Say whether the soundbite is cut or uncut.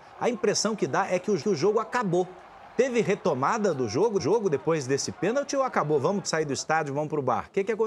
cut